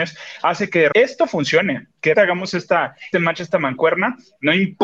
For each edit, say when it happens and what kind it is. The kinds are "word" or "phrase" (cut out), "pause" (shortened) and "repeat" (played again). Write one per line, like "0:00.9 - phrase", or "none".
0:00.9 - word
0:02.1 - word
0:03.1 - word